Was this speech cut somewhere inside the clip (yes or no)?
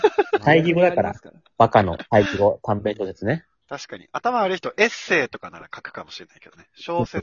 yes